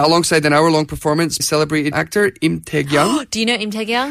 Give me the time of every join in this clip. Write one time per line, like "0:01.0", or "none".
0:01.4
0:01.9